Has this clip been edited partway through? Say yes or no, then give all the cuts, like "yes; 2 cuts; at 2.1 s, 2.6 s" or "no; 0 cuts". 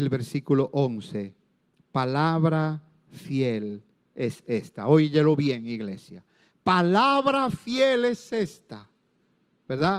no; 0 cuts